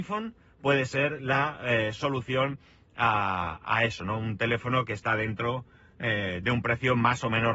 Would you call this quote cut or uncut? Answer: uncut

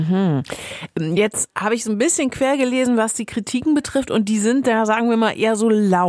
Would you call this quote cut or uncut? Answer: uncut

